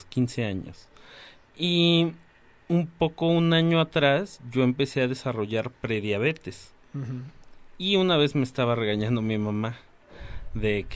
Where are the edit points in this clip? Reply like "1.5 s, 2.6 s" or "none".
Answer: none